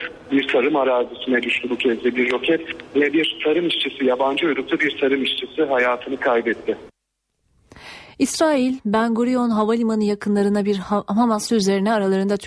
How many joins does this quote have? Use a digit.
1